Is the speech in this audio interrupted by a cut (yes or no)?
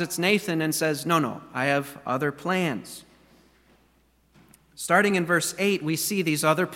no